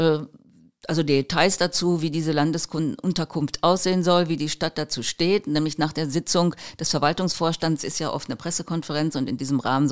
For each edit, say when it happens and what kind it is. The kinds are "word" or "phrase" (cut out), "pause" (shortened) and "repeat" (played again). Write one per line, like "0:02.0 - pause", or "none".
none